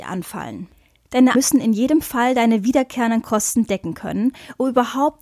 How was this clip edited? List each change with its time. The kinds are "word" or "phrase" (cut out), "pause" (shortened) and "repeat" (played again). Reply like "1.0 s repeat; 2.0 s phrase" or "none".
1.3 s word